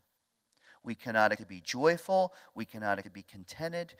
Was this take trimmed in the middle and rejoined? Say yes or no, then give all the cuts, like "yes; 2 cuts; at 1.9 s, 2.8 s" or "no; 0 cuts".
yes; 2 cuts; at 1.3 s, 3.0 s